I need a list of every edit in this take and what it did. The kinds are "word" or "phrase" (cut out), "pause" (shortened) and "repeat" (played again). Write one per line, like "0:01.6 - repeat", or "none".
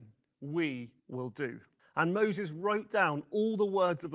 0:01.0 - pause
0:01.8 - pause

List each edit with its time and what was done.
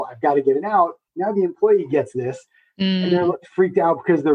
0:01.1 - pause

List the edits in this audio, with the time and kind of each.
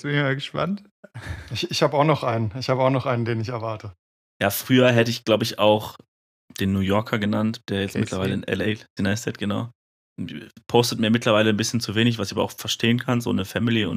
0:09.0 - word

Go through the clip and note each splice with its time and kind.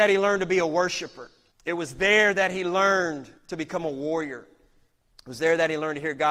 0:01.5 - pause
0:03.4 - pause

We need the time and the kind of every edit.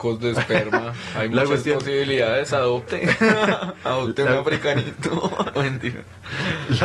0:05.6 - word

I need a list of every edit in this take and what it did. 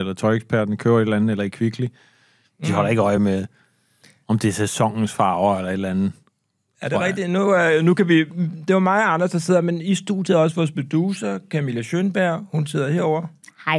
none

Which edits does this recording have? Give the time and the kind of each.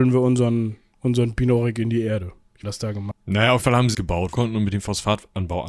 0:02.6 - phrase
0:03.6 - word
0:03.9 - word
0:04.3 - phrase

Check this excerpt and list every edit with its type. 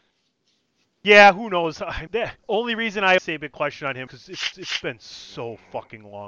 0:02.1 - word
0:02.4 - pause
0:03.2 - word
0:04.1 - word
0:04.5 - repeat

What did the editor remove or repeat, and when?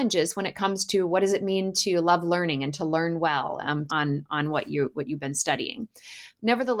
0:03.9 - phrase

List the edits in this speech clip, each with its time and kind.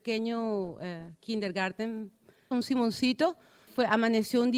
0:02.5 - word
0:03.7 - word

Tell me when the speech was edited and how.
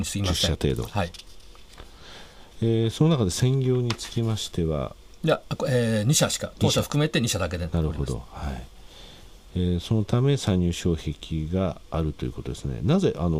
none

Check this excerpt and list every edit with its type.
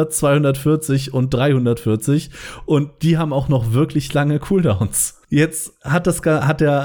0:05.2 - pause

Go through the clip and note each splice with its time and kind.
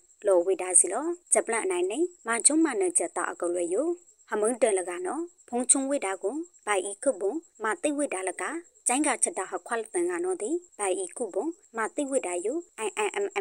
0:01.2 - pause
0:02.2 - pause

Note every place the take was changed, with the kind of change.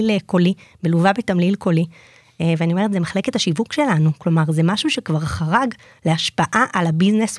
none

